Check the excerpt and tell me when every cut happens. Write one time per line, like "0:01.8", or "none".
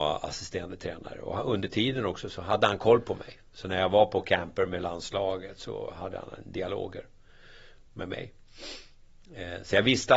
none